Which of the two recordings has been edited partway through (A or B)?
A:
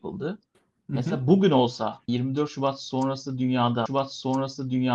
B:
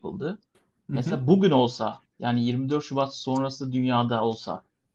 A